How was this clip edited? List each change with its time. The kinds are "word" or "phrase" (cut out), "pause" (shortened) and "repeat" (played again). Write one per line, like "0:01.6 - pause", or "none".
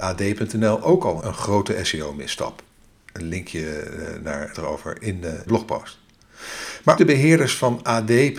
0:01.2 - word
0:04.5 - word
0:05.5 - phrase
0:07.0 - word